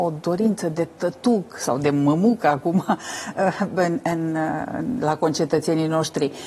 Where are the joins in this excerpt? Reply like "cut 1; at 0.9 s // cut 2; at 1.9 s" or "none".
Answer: none